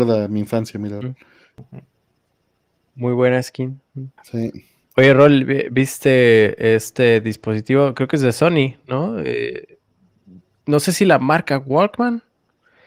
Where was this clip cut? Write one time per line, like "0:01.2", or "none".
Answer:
0:04.2